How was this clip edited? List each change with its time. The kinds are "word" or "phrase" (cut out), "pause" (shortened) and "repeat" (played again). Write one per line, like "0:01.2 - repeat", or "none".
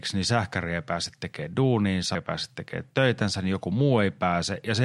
0:02.1 - phrase